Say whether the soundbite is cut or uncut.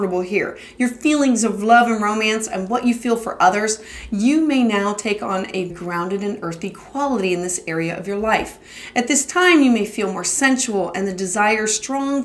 cut